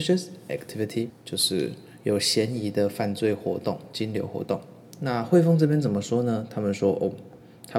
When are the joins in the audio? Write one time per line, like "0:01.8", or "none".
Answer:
0:01.1